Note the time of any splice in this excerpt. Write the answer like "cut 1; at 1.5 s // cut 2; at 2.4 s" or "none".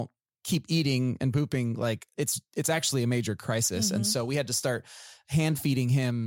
none